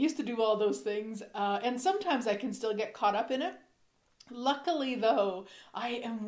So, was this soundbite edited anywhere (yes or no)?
no